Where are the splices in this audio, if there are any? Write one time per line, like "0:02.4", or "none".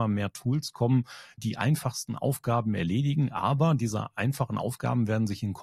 0:01.4

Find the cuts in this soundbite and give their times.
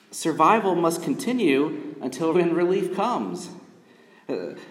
0:02.3

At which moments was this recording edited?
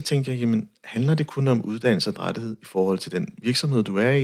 0:02.2

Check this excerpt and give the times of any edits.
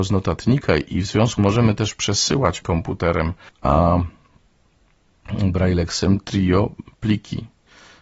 0:01.4
0:02.6
0:03.5

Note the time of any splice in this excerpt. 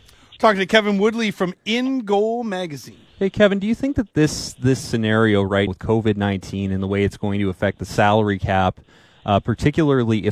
0:03.1
0:05.7

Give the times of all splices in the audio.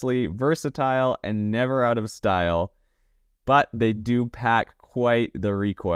none

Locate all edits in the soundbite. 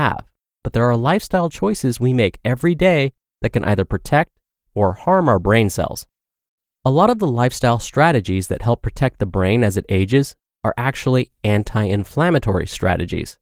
none

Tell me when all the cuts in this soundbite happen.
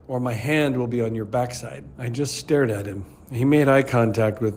0:01.9

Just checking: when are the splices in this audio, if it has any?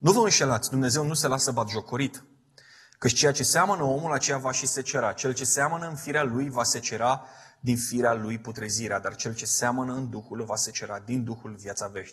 none

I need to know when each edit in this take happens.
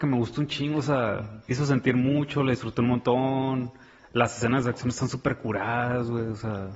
0:01.5

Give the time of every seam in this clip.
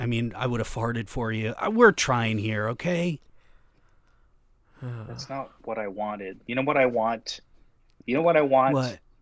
none

